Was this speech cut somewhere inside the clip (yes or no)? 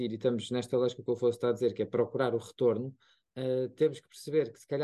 no